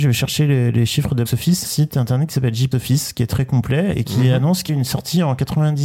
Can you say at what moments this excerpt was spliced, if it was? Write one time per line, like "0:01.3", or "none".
0:01.3
0:01.6
0:02.7
0:04.7